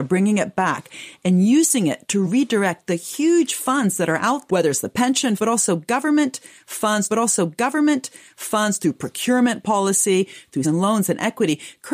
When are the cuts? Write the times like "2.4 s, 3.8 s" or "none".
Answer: 2.2 s, 4.5 s, 5.4 s, 7.1 s, 10.6 s